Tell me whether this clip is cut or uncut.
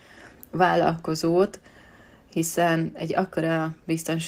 uncut